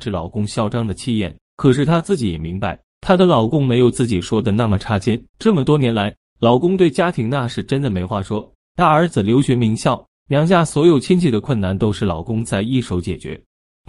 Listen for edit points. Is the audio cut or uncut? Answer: cut